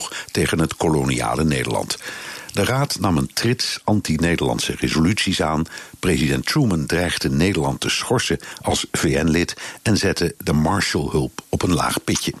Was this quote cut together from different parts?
no; 0 cuts

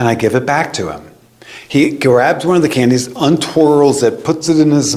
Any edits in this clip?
no; 0 cuts

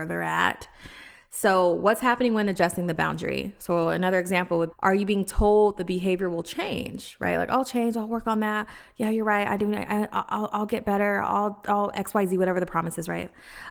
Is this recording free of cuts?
no; 1 cut; at 4.7 s

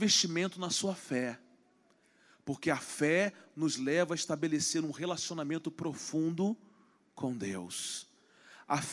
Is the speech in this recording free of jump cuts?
yes; 0 cuts

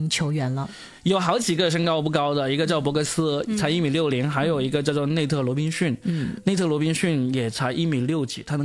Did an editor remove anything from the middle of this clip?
no; 0 cuts

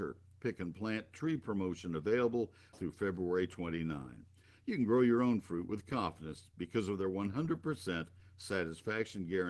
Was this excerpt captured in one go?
no; 1 cut; at 2.7 s

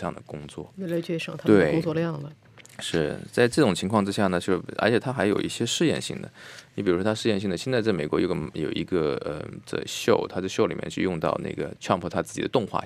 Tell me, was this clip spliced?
yes; 1 cut; at 11.8 s

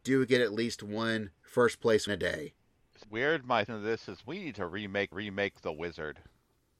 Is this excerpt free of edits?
no; 6 cuts; at 1.3 s, 2.1 s, 3.0 s, 3.7 s, 4.2 s, 5.1 s

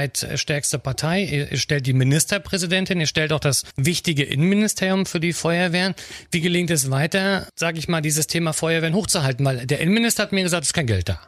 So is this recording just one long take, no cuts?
yes; 0 cuts

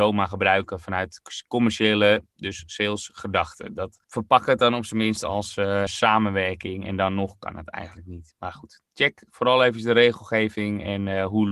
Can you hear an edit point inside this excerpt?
yes; 2 cuts; at 4.0 s, 5.9 s

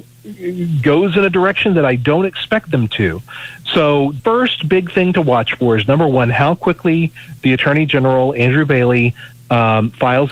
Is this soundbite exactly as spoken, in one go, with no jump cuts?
no; 1 cut; at 4.2 s

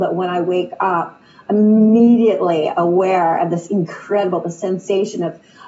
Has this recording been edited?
no; 0 cuts

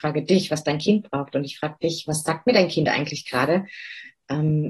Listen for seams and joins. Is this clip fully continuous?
yes; 0 cuts

